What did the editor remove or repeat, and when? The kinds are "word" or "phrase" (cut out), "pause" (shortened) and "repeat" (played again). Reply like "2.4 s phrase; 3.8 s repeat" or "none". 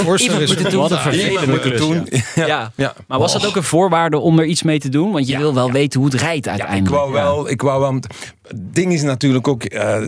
none